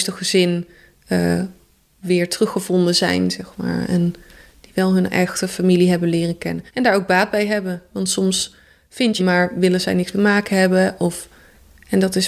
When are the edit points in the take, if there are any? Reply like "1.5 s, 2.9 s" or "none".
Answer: 6.7 s, 9.2 s, 10.1 s